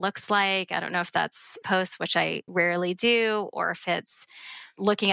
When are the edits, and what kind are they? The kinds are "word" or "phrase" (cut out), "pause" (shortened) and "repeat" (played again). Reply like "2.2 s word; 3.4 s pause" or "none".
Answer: 1.6 s word; 2.5 s word